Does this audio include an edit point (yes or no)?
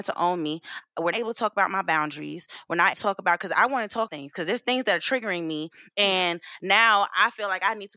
yes